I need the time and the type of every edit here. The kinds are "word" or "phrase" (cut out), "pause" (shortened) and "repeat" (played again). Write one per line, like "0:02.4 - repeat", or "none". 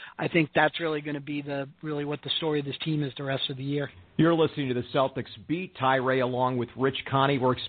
none